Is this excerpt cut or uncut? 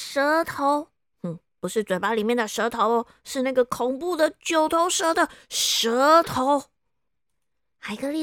uncut